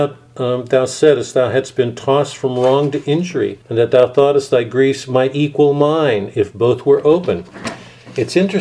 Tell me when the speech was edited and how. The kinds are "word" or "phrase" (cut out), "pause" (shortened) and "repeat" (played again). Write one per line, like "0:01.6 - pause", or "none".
0:03.6 - pause

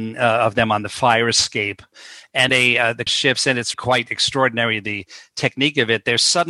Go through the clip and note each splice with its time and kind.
0:02.5 - word
0:03.1 - word
0:03.7 - word

